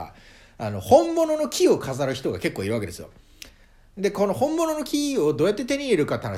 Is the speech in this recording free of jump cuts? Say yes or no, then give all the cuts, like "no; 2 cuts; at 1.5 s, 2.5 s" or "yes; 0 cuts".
yes; 0 cuts